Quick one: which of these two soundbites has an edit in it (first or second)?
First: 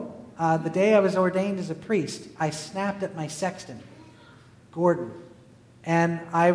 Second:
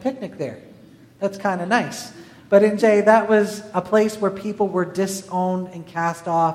second